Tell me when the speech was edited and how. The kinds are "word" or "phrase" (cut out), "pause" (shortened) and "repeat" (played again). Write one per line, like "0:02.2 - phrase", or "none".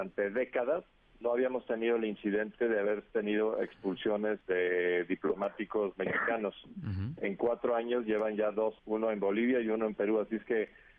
0:01.0 - pause
0:04.4 - pause
0:08.8 - pause